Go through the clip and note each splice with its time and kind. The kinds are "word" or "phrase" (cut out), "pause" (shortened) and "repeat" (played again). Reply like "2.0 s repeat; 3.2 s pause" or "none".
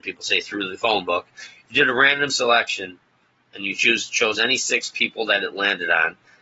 none